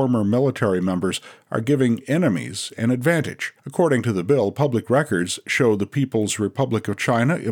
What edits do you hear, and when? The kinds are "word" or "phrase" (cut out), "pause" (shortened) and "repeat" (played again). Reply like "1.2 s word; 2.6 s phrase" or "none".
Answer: 3.6 s pause